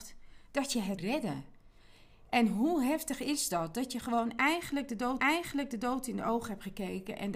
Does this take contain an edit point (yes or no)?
yes